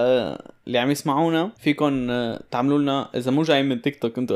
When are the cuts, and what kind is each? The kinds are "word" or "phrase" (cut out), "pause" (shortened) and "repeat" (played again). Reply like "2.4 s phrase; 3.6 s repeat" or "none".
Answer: 1.6 s pause